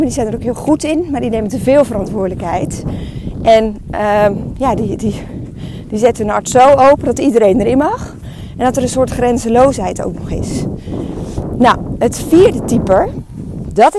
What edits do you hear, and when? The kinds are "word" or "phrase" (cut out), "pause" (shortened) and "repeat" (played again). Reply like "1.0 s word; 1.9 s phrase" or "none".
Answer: none